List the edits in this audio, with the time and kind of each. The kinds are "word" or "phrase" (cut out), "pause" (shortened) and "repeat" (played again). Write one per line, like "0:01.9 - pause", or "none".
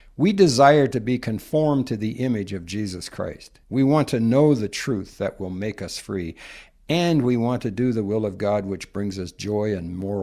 0:03.6 - pause